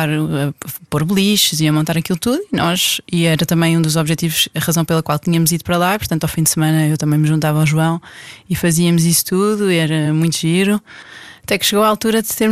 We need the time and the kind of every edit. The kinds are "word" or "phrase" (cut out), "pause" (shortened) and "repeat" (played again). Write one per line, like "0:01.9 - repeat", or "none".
none